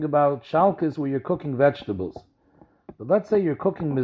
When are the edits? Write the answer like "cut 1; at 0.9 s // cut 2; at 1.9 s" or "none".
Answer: none